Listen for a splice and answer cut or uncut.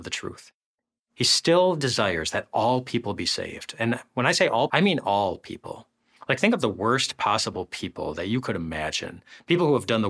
cut